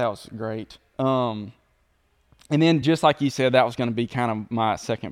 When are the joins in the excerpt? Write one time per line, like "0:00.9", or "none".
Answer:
none